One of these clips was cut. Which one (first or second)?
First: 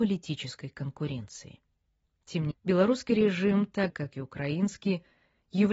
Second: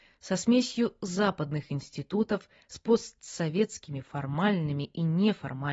first